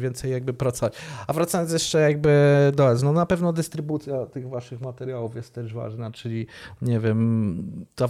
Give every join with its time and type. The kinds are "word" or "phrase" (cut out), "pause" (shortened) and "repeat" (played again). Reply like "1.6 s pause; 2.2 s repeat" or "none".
none